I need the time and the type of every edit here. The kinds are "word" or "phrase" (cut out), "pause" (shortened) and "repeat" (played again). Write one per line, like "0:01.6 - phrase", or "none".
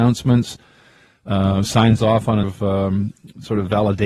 0:02.4 - word